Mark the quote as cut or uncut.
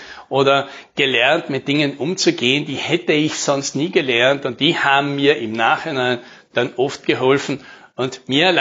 uncut